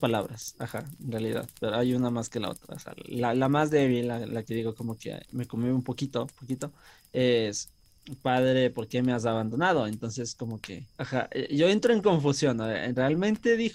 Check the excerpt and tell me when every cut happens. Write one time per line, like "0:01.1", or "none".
0:05.3
0:06.3
0:10.9